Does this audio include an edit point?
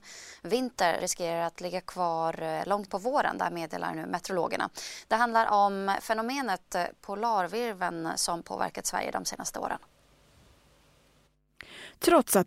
yes; 2 cuts; at 1.0 s, 2.9 s

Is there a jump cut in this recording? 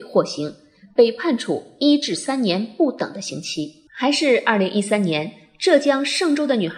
yes; 1 cut; at 3.9 s

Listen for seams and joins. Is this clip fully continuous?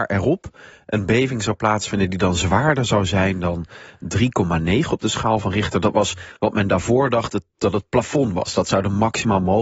no; 1 cut; at 6.4 s

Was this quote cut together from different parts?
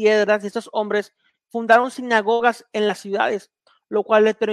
no; 0 cuts

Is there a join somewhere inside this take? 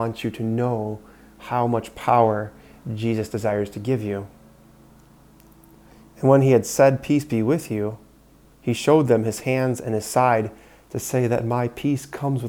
no; 0 cuts

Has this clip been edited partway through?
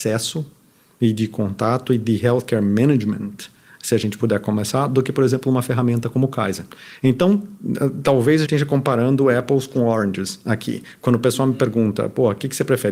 yes; 1 cut; at 8.4 s

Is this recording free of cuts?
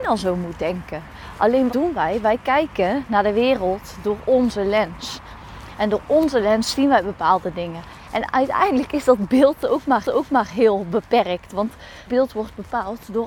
no; 3 cuts; at 1.7 s, 10.0 s, 12.1 s

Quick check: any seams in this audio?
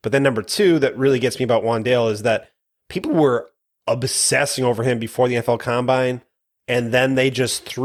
no; 0 cuts

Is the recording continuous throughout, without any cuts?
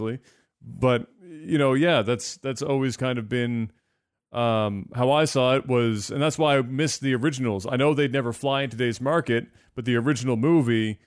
yes; 0 cuts

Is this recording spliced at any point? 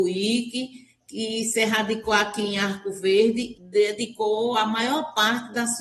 yes; 1 cut; at 3.5 s

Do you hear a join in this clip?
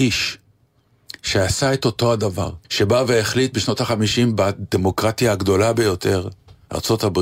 yes; 1 cut; at 2.6 s

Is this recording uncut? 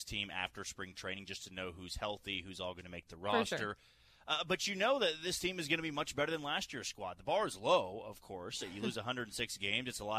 yes; 0 cuts

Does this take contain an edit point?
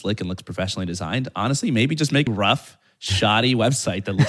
yes; 1 cut; at 2.3 s

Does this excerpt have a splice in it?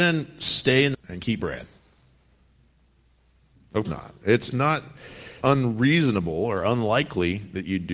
yes; 5 cuts; at 0.9 s, 1.4 s, 3.8 s, 4.5 s, 5.4 s

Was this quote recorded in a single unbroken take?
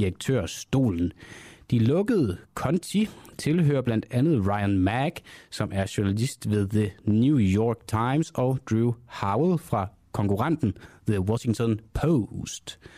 yes; 0 cuts

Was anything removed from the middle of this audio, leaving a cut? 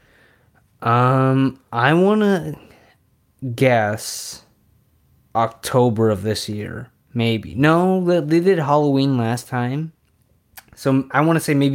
no; 0 cuts

